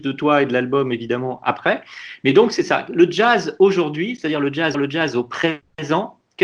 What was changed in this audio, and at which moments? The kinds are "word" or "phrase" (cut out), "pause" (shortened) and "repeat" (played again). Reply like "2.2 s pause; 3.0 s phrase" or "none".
4.7 s repeat